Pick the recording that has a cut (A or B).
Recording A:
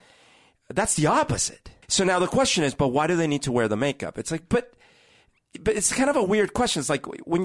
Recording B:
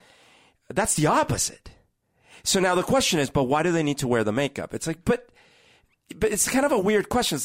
A